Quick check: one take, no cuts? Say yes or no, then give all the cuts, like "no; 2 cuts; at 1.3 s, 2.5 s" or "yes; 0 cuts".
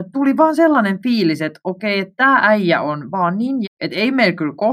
no; 1 cut; at 3.6 s